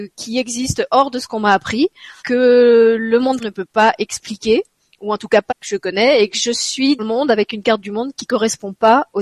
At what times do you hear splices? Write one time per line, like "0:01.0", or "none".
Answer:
0:02.2
0:03.4
0:05.5
0:07.0